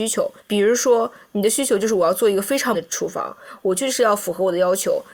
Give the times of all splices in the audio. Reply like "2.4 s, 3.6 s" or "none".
2.7 s